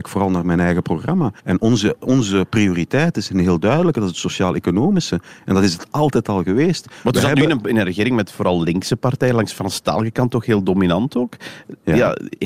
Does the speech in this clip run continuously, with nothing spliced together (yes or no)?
no